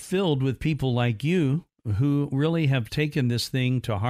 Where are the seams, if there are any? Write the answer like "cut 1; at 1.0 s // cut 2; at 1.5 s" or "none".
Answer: none